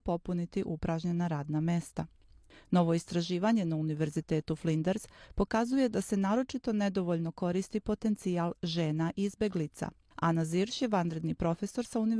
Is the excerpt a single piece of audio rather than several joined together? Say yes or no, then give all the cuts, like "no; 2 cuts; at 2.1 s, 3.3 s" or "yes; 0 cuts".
yes; 0 cuts